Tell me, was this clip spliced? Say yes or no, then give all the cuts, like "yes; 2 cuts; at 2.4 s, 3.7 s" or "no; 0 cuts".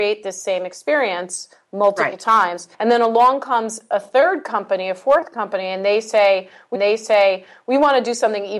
yes; 2 cuts; at 2.7 s, 6.7 s